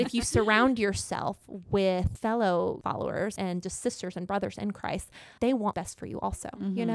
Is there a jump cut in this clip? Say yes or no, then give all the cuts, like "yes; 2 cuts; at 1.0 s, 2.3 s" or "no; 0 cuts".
yes; 4 cuts; at 2.8 s, 3.4 s, 5.4 s, 5.7 s